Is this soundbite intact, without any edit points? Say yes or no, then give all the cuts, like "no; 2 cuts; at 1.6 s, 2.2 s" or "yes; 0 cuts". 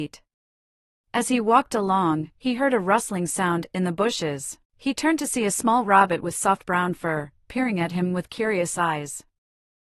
no; 1 cut; at 4.6 s